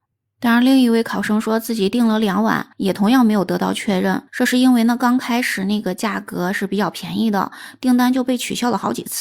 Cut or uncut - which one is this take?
cut